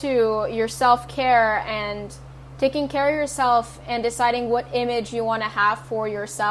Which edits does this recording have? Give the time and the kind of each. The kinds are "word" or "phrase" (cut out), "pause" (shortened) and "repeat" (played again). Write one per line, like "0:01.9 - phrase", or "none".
none